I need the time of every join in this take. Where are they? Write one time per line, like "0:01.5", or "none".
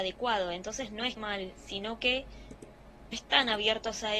0:01.2
0:03.1

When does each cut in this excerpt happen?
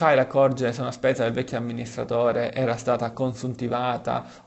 none

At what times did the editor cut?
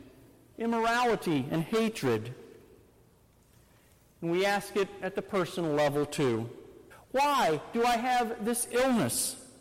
0:06.9

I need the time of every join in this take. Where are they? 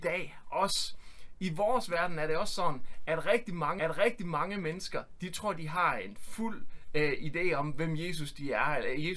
0:03.8

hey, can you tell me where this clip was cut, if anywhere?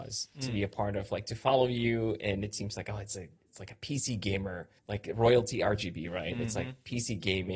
0:04.8

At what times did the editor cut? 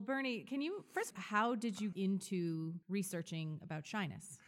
0:01.1
0:01.9
0:02.8

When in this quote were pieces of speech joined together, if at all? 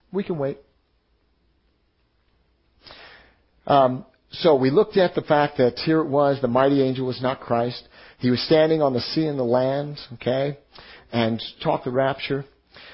0:11.8

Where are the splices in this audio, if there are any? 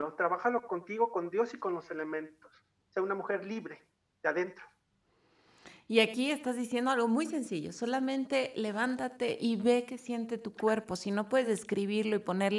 none

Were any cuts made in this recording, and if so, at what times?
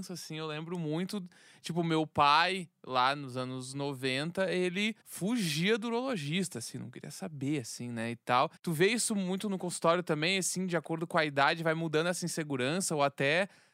0:05.0
0:08.6

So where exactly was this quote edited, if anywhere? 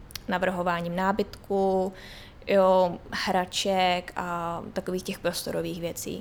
none

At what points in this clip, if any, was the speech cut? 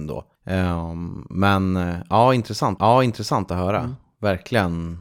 0:02.8

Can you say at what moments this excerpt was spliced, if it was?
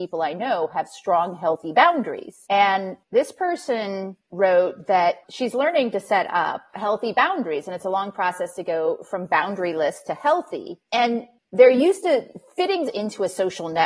0:12.8

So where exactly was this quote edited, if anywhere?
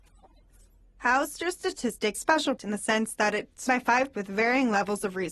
0:02.1
0:02.6
0:03.7
0:04.1

